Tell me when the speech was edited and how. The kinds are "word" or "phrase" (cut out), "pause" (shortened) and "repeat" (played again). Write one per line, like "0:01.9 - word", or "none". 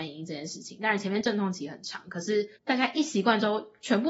0:02.6 - pause

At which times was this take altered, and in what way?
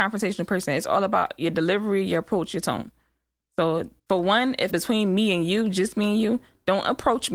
0:04.0 - pause
0:04.7 - phrase

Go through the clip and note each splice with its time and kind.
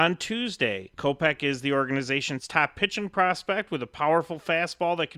0:00.9 - pause

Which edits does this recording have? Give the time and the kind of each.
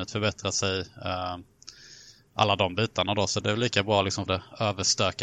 0:03.4 - word
0:04.3 - word

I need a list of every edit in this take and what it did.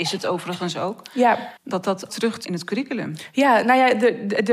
0:01.6 - pause
0:02.1 - word
0:02.4 - phrase

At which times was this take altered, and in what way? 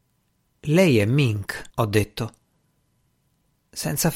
0:01.7 - pause

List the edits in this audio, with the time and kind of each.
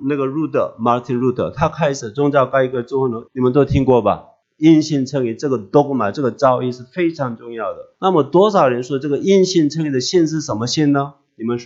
0:03.3 - phrase
0:04.4 - pause
0:07.9 - pause

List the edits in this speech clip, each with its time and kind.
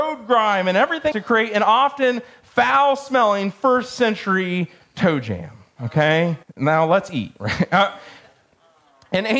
0:01.1 - word
0:06.4 - pause

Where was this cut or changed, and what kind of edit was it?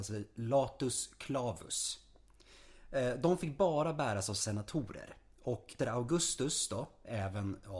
0:05.8 - word

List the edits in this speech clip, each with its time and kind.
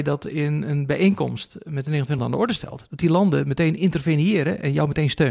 0:02.2 - word

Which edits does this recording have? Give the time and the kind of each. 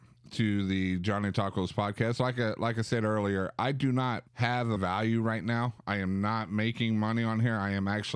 0:04.3 - pause
0:04.8 - word

